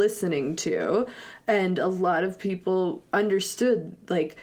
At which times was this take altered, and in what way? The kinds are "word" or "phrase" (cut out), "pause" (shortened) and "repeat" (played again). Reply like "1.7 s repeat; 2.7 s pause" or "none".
none